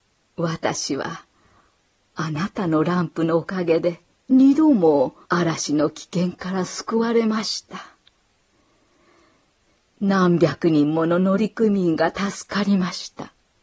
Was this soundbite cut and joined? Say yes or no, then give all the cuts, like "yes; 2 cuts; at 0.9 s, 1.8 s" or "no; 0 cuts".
yes; 2 cuts; at 4.1 s, 5.2 s